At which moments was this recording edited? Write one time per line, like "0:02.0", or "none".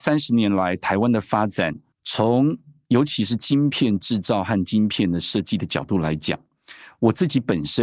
0:01.9

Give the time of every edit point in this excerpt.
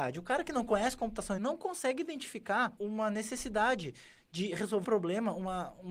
0:01.4
0:02.8
0:04.8

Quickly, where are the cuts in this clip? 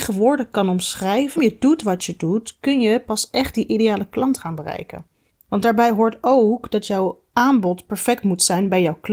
0:01.4

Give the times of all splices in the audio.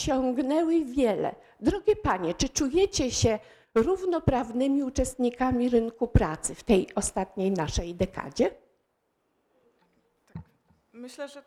none

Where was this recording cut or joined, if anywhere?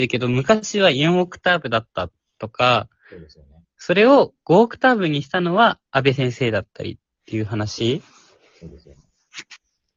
0:03.6

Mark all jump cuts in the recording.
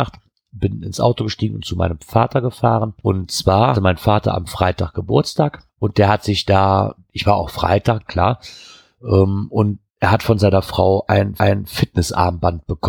0:03.7
0:08.1
0:09.9
0:11.4

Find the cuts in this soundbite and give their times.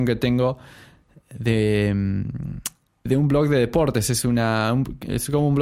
0:03.1

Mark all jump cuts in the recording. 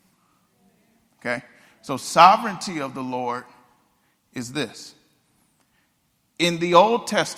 none

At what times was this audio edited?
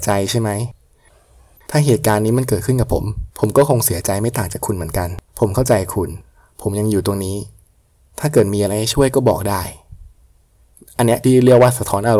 0:03.3
0:05.3

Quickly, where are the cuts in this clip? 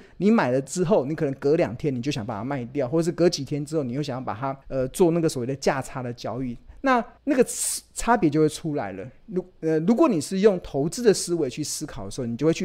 0:04.6
0:07.2

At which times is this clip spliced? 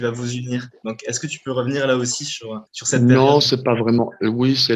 0:02.7

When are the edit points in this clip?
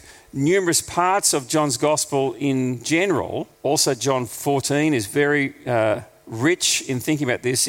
0:03.6

